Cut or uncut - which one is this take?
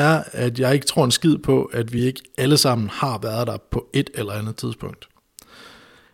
uncut